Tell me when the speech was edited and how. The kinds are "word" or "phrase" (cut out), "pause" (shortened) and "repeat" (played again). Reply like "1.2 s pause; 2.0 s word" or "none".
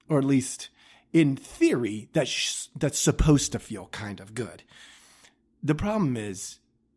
none